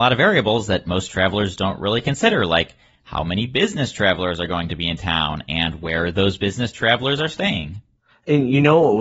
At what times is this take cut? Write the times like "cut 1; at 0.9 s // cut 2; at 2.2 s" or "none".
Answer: none